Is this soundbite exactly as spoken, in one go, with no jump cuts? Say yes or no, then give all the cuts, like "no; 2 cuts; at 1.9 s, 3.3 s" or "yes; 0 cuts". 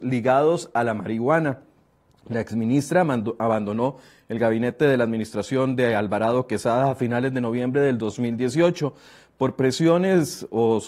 yes; 0 cuts